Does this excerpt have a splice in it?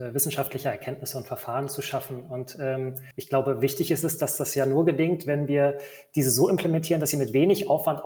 yes; 1 cut; at 3.1 s

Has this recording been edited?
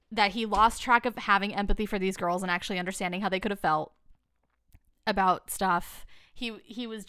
no; 0 cuts

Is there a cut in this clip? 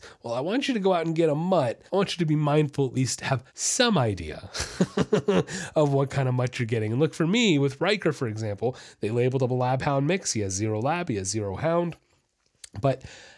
yes; 2 cuts; at 1.9 s, 3.5 s

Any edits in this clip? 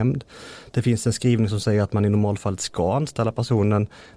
no; 0 cuts

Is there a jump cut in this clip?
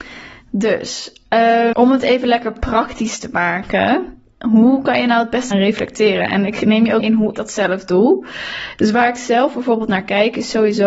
yes; 4 cuts; at 1.7 s, 5.5 s, 7.0 s, 7.3 s

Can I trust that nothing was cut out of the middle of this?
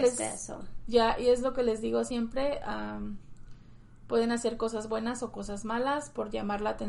yes; 0 cuts

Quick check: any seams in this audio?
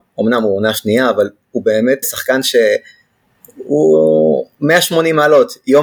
yes; 1 cut; at 2.0 s

